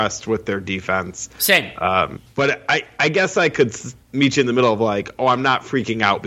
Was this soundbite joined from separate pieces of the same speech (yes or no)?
yes